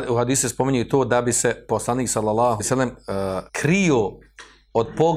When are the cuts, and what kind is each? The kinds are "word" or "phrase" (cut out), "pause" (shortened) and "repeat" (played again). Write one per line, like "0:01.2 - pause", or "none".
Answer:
0:02.6 - word
0:03.5 - pause